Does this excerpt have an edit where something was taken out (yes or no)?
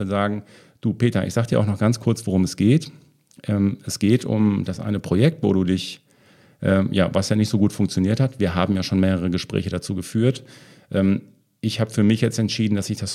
no